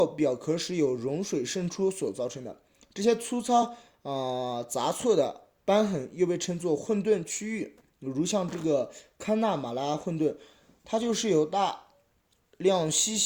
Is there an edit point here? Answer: no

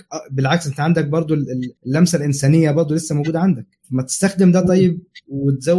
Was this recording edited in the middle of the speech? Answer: yes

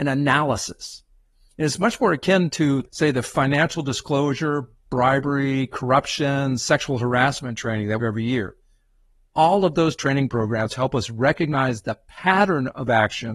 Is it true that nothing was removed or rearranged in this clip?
no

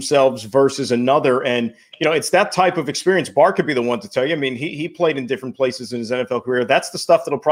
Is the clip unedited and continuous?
yes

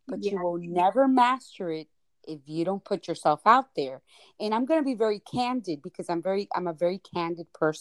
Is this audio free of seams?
yes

